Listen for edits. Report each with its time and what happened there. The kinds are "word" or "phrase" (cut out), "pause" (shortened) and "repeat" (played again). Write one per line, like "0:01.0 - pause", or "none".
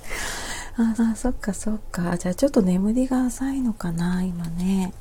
0:01.0 - repeat